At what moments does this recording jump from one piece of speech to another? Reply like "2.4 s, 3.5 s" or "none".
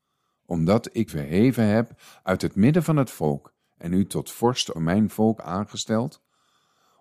1.1 s, 4.7 s, 5.4 s